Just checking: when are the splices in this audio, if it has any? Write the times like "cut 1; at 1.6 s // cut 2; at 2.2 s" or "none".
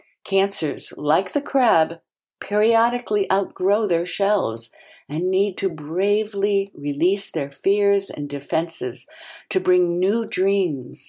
none

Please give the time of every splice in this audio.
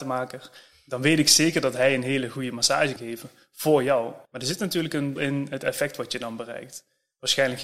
cut 1; at 3.0 s // cut 2; at 4.3 s // cut 3; at 5.2 s

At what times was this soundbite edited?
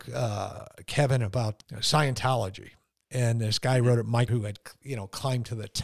cut 1; at 1.6 s // cut 2; at 4.3 s

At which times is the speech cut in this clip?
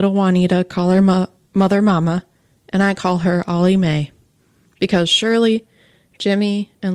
none

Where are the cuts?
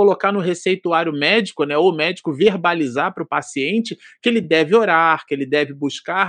none

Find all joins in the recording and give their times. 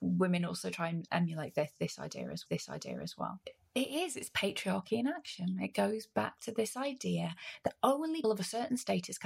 cut 1; at 1.1 s // cut 2; at 2.5 s // cut 3; at 8.2 s

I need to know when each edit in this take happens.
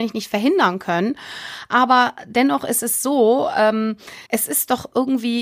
cut 1; at 4.2 s

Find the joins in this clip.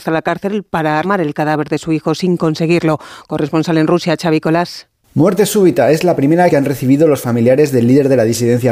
cut 1; at 1.0 s // cut 2; at 6.5 s

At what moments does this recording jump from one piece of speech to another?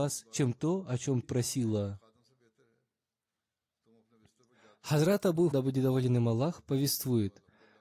cut 1; at 1.2 s // cut 2; at 5.5 s

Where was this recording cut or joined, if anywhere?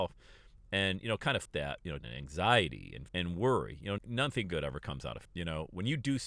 cut 1; at 1.5 s // cut 2; at 2.0 s // cut 3; at 3.1 s // cut 4; at 4.0 s // cut 5; at 5.2 s

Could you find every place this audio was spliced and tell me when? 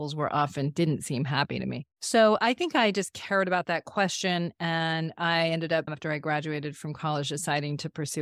cut 1; at 1.9 s

